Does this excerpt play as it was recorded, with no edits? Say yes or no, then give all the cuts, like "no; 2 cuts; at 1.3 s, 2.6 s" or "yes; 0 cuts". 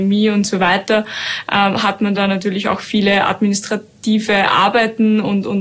yes; 0 cuts